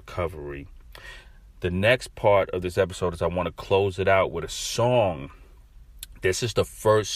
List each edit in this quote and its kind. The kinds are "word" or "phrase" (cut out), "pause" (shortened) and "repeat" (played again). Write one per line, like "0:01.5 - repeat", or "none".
none